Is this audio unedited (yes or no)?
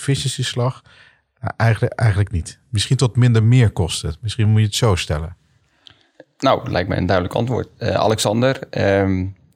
yes